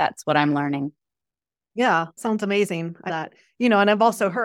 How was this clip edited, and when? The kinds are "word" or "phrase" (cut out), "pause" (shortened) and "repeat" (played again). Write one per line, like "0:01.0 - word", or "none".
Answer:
0:02.2 - word
0:03.1 - word